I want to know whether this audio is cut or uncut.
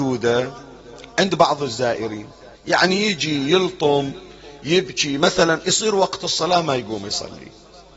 cut